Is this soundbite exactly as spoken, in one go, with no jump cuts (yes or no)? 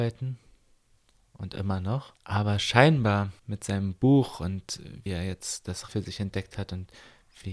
no